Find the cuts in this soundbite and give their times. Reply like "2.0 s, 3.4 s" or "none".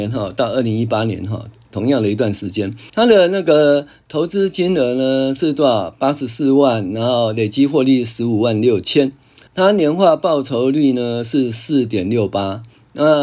2.9 s, 9.5 s